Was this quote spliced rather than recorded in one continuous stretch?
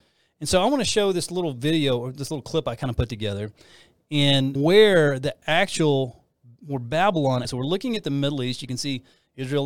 yes; 3 cuts; at 4.6 s, 6.3 s, 7.4 s

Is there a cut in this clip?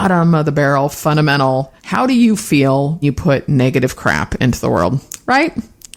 yes; 2 cuts; at 1.8 s, 3.0 s

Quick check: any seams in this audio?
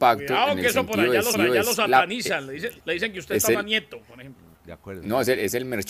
yes; 4 cuts; at 1.3 s, 2.8 s, 3.5 s, 4.5 s

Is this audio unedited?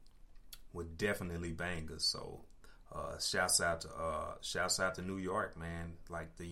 yes; 0 cuts

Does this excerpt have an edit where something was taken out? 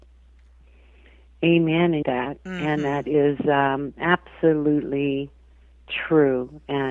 yes; 1 cut; at 2.0 s

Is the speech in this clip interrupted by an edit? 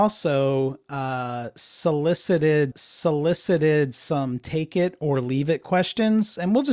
yes; 1 cut; at 2.7 s

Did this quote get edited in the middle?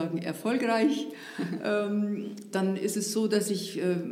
yes; 1 cut; at 2.5 s

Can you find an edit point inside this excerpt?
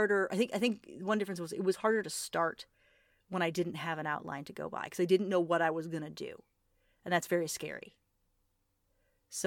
no; 0 cuts

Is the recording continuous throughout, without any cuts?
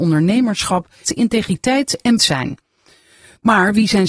no; 2 cuts; at 1.0 s, 2.2 s

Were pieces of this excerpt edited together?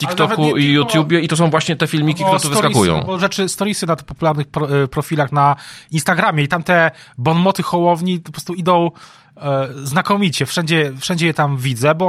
no; 0 cuts

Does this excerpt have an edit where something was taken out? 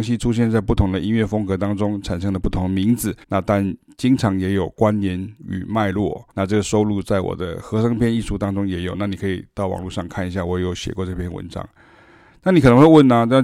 yes; 2 cuts; at 3.2 s, 6.3 s

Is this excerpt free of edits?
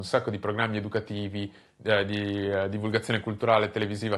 yes; 0 cuts

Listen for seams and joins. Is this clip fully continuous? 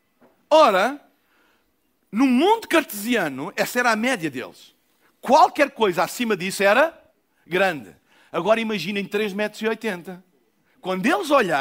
yes; 0 cuts

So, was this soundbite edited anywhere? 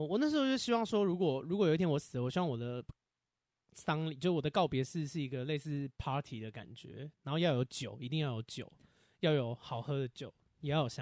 no; 0 cuts

